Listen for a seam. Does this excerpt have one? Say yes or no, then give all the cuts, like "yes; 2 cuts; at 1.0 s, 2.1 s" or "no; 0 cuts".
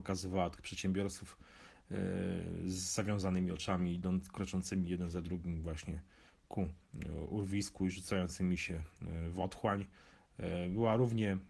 no; 0 cuts